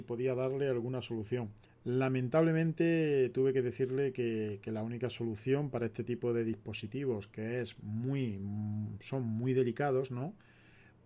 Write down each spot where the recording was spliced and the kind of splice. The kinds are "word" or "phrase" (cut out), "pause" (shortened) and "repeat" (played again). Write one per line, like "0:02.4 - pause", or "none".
0:01.6 - pause